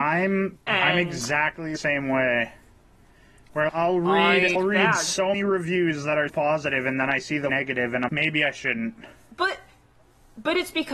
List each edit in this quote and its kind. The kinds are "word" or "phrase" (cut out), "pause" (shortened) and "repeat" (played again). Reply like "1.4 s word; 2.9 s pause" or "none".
1.8 s word; 3.7 s word; 4.5 s word; 5.3 s word; 6.3 s word; 7.5 s word; 8.1 s word